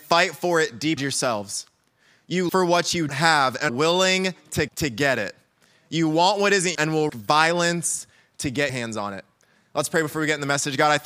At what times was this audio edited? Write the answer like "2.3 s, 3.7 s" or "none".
1.0 s, 2.5 s, 3.1 s, 3.7 s, 4.7 s, 6.7 s, 7.1 s, 8.7 s